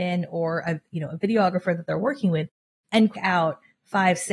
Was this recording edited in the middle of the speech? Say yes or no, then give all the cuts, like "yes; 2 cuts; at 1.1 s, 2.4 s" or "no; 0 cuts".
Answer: yes; 1 cut; at 3.1 s